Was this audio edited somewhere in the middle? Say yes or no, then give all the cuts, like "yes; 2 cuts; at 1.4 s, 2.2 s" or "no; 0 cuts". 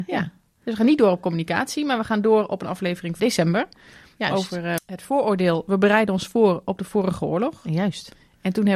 yes; 2 cuts; at 3.2 s, 4.8 s